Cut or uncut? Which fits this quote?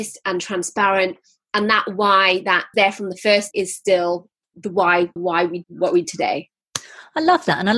cut